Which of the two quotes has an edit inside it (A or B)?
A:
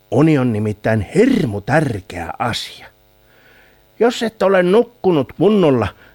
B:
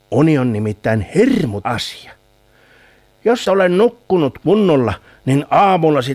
B